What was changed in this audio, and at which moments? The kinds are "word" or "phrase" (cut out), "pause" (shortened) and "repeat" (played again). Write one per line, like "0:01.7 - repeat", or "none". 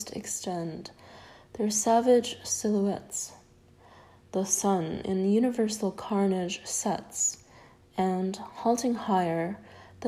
none